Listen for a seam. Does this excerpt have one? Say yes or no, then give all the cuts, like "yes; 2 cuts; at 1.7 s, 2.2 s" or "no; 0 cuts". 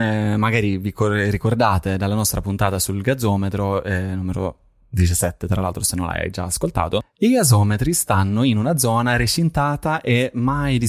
no; 0 cuts